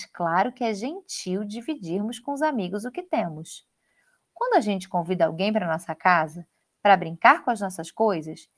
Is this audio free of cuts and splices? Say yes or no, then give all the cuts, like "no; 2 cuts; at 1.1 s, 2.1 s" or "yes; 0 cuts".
yes; 0 cuts